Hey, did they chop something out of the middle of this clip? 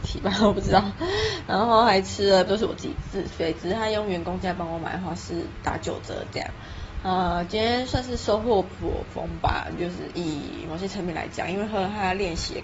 yes; 1 cut; at 2.5 s

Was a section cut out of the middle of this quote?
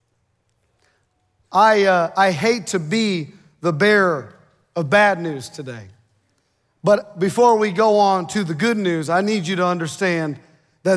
no; 0 cuts

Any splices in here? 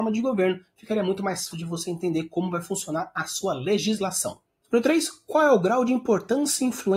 yes; 1 cut; at 1.5 s

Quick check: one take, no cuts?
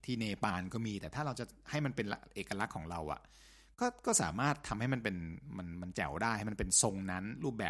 yes; 0 cuts

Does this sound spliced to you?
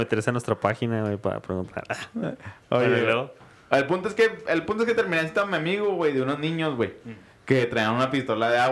no; 0 cuts

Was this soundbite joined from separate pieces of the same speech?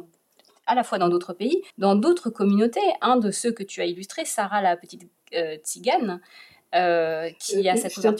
yes; 1 cut; at 1.7 s

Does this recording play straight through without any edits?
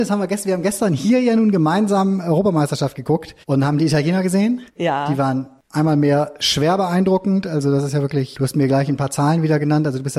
no; 2 cuts; at 3.4 s, 4.7 s

